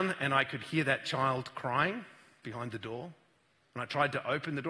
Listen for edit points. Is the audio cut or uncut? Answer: uncut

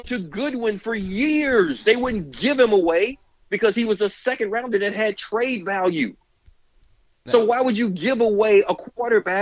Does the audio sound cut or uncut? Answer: uncut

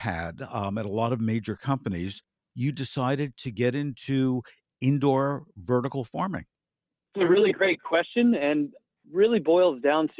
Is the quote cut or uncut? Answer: uncut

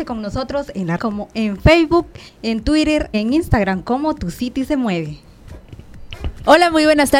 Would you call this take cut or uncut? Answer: cut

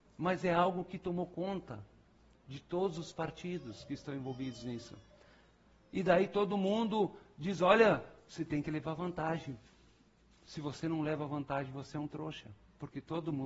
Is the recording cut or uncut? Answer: uncut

